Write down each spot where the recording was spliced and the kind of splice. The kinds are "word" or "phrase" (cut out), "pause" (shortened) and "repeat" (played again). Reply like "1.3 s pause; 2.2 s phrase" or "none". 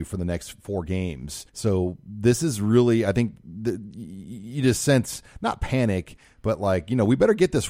1.5 s pause

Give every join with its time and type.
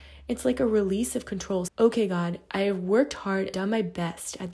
1.7 s word; 3.5 s word

